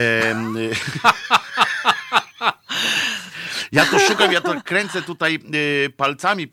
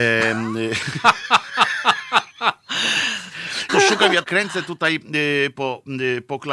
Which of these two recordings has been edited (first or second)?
second